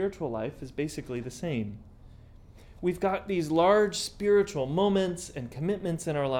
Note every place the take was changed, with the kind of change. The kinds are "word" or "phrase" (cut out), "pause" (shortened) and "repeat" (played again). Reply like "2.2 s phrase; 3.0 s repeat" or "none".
none